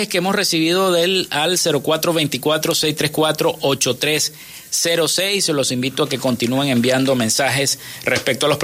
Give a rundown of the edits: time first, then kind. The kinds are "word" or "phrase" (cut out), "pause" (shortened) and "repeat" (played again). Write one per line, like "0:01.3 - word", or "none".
none